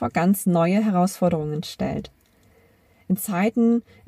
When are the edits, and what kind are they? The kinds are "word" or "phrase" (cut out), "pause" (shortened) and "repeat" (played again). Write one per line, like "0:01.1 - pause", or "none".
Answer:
none